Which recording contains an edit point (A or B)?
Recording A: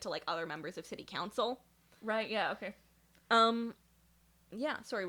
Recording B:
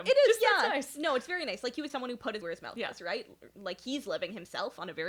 B